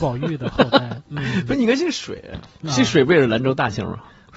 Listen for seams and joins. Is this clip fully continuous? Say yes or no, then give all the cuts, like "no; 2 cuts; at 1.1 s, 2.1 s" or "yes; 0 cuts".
yes; 0 cuts